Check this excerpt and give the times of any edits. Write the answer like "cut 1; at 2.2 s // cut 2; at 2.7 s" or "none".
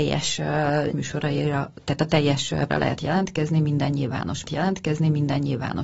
cut 1; at 0.9 s // cut 2; at 2.7 s // cut 3; at 4.5 s